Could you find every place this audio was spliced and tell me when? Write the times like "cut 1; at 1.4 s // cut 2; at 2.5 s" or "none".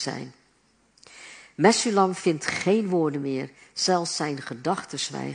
none